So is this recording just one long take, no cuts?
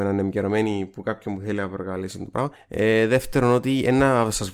no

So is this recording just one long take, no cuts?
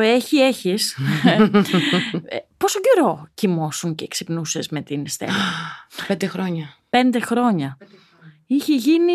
yes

